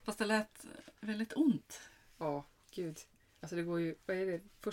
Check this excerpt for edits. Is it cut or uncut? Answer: uncut